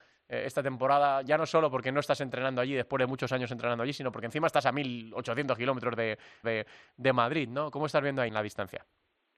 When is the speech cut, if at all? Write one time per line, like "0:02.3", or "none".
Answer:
0:06.4
0:08.3